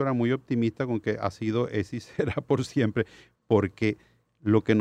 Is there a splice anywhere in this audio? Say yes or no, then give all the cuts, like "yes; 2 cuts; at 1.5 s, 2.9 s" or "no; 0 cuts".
no; 0 cuts